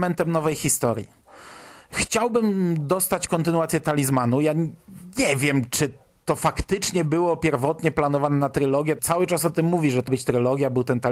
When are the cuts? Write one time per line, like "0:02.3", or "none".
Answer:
0:09.0
0:10.1